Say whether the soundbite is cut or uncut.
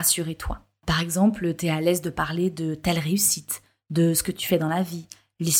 uncut